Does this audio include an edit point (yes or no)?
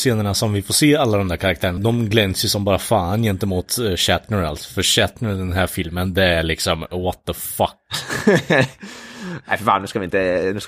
yes